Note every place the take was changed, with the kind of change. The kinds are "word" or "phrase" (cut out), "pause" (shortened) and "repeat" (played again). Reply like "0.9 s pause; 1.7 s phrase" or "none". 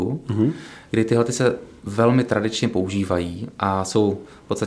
none

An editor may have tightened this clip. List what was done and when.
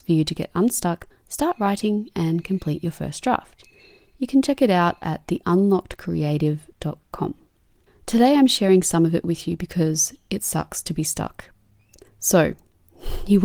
none

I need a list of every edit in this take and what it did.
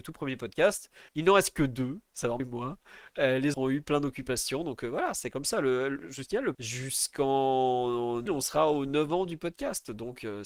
1.1 s pause; 2.4 s word; 3.5 s word; 6.5 s phrase; 8.3 s word

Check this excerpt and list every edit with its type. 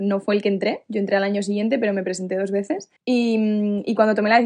3.0 s pause

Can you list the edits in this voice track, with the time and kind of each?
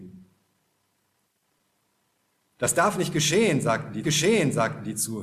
4.0 s repeat

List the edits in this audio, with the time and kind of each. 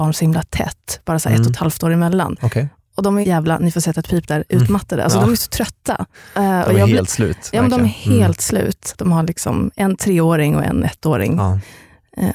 3.2 s word; 6.1 s pause

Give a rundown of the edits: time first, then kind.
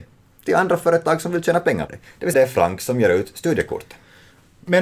1.9 s word; 2.3 s word

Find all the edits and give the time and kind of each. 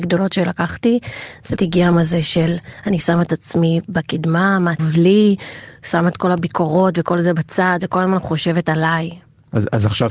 1.6 s word; 1.9 s word; 4.8 s word

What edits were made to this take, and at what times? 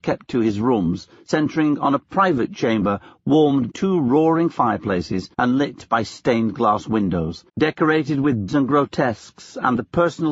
3.7 s word; 5.3 s pause; 7.5 s pause; 8.5 s word

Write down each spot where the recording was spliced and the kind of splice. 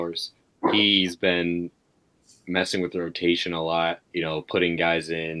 4.0 s pause

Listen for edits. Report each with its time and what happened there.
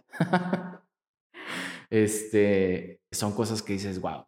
3.1 s word

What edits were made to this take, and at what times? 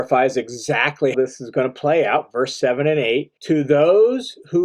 1.1 s word; 3.4 s pause

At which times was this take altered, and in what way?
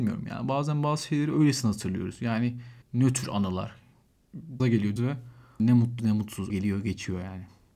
2.8 s pause; 4.6 s word; 5.0 s word; 5.6 s word; 6.0 s word; 6.5 s word

